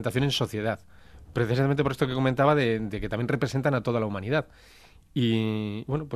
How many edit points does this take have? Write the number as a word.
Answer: zero